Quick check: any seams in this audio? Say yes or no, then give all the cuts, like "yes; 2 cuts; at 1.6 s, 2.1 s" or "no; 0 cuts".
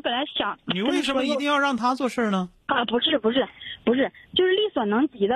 yes; 1 cut; at 2.6 s